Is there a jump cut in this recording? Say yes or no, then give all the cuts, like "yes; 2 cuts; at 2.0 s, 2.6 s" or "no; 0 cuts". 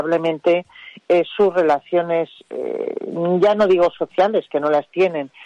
no; 0 cuts